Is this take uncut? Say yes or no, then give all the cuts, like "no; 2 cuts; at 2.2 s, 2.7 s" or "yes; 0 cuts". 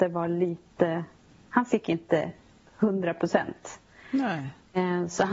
yes; 0 cuts